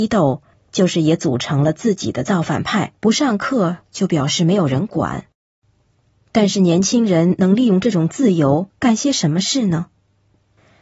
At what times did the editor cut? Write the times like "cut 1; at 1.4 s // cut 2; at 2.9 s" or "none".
cut 1; at 3.0 s